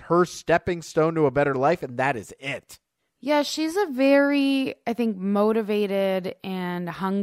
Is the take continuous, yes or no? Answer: yes